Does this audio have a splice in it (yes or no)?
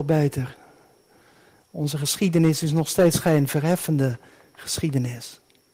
no